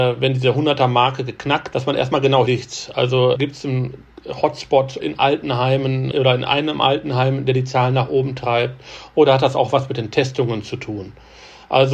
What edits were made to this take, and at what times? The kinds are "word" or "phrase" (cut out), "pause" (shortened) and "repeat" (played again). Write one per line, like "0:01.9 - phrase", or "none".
0:01.7 - word
0:02.5 - phrase
0:03.3 - word
0:05.0 - word